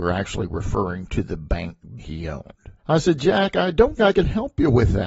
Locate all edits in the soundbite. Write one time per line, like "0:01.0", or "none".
0:02.0
0:02.8
0:04.0